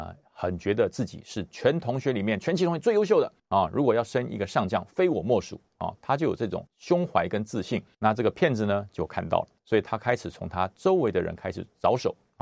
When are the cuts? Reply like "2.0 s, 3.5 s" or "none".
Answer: 3.4 s, 6.7 s, 7.9 s, 9.6 s